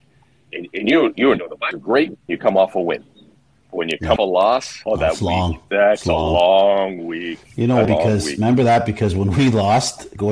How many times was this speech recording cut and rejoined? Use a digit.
6